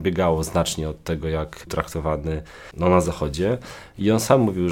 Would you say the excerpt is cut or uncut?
cut